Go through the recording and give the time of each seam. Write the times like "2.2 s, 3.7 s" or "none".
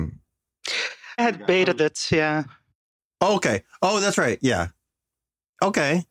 1.2 s, 1.8 s